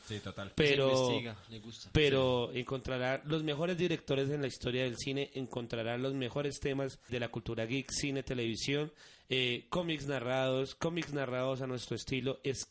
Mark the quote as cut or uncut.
cut